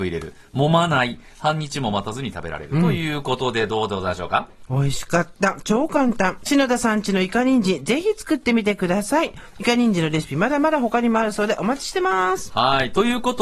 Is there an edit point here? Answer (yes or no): yes